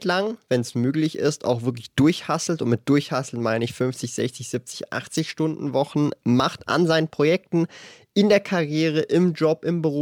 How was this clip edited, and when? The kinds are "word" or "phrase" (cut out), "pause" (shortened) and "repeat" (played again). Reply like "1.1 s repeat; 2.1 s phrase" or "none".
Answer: none